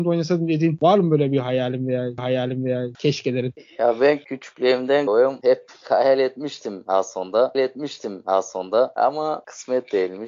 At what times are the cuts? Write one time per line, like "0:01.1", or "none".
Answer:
0:02.2
0:05.1
0:07.5